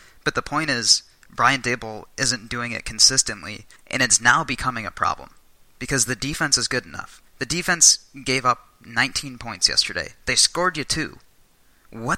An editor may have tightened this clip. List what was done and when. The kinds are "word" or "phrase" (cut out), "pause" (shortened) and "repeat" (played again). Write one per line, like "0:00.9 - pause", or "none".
0:03.8 - pause
0:07.3 - pause